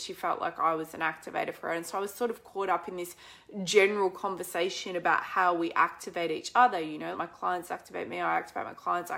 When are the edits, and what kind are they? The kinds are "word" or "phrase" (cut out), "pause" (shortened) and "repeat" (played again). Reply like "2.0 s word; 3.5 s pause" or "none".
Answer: 7.1 s word